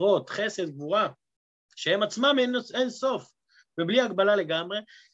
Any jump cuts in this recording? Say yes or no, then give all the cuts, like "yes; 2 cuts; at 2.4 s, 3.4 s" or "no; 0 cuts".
no; 0 cuts